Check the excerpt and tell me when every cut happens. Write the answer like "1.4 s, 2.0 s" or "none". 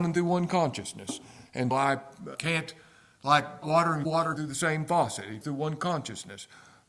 1.7 s, 2.3 s, 3.6 s, 4.0 s, 4.4 s, 5.4 s